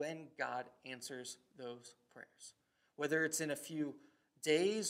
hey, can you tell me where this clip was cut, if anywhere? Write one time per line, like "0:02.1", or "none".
none